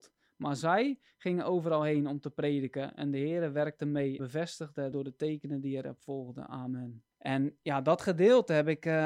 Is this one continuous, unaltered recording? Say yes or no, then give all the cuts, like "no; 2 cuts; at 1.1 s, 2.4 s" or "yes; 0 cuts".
no; 3 cuts; at 4.2 s, 4.9 s, 7.1 s